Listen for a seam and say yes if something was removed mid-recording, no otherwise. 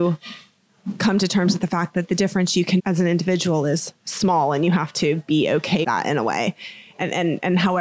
yes